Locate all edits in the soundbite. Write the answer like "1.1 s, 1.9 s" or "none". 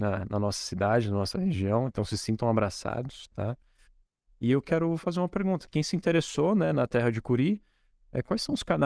none